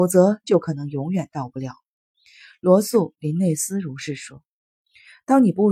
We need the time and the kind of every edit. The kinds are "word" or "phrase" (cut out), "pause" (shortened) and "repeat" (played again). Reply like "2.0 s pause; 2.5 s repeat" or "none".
none